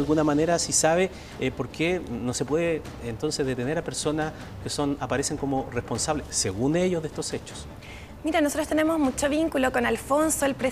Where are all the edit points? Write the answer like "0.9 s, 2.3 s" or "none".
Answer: none